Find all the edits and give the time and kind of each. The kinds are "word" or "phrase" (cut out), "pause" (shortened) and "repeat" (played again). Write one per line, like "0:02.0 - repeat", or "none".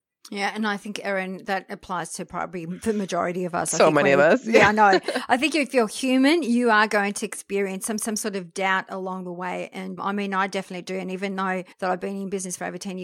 0:08.0 - repeat
0:10.0 - word
0:11.7 - pause